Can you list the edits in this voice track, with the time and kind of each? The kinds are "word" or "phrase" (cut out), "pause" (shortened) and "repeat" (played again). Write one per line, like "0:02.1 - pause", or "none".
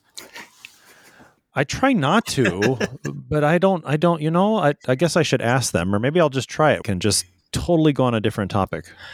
0:06.8 - phrase